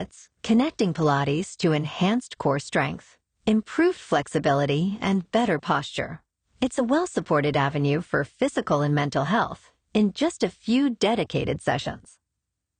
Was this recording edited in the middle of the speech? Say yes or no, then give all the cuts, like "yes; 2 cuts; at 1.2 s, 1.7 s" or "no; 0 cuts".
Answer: no; 0 cuts